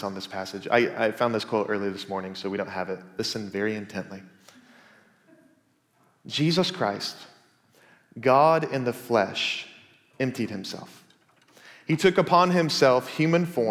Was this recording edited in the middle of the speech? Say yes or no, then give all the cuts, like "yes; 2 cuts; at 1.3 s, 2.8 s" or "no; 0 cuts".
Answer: no; 0 cuts